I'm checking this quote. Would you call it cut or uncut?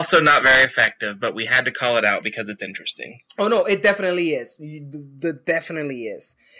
uncut